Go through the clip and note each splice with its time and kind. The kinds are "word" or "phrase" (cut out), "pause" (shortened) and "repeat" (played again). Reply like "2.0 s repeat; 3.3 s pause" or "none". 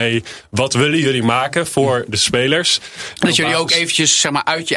none